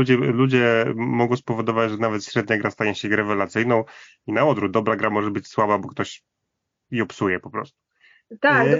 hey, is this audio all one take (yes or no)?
yes